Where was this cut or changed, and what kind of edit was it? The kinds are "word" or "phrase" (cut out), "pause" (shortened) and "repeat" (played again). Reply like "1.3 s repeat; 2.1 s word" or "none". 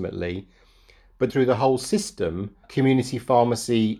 1.3 s word; 2.6 s word